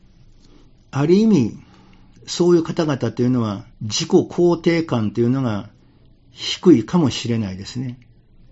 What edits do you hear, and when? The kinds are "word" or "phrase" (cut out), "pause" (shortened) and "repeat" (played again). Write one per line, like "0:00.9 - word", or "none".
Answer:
0:03.7 - pause